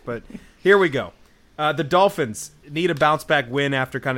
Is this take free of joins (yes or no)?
yes